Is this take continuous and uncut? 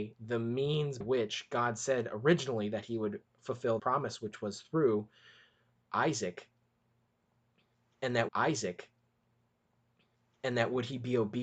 no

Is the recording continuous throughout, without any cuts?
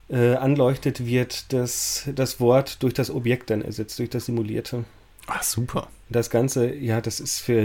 yes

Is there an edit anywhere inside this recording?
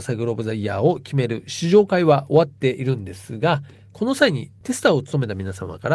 no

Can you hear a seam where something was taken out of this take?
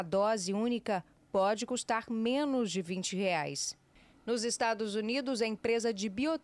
no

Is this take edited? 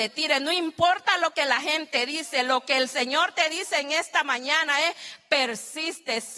no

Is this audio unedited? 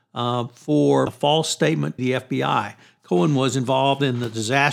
no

